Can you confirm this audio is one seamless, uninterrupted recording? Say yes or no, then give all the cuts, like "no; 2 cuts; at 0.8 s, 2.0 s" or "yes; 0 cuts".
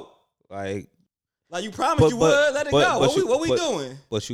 yes; 0 cuts